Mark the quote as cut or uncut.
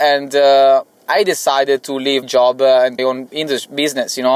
cut